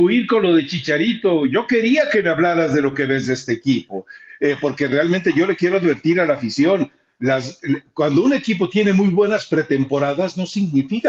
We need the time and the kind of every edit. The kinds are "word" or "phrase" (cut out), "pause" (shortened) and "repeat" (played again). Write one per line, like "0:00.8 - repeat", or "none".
none